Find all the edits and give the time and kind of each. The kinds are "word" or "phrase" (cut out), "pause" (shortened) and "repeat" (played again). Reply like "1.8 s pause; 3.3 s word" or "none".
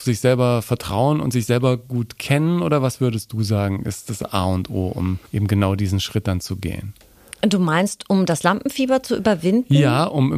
5.3 s pause